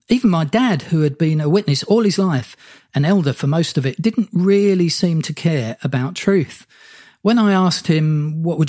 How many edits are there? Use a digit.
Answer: 0